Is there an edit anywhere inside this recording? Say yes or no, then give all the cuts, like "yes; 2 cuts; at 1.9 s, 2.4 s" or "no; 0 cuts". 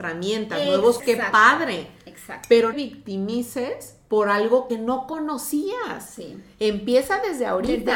yes; 3 cuts; at 1.0 s, 2.7 s, 4.7 s